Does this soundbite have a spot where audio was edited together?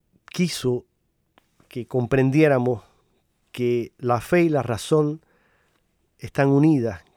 no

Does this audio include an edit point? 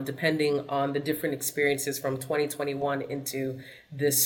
no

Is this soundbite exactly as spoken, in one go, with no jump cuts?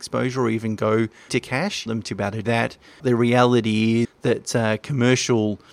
no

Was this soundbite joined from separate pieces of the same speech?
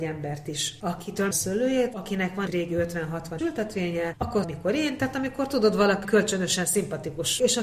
yes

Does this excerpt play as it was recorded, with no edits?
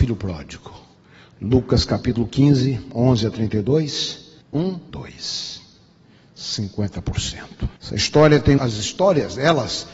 no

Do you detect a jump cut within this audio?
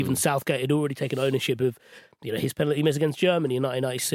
no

